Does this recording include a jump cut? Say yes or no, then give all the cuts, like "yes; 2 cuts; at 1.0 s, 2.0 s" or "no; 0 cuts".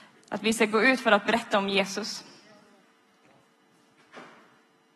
no; 0 cuts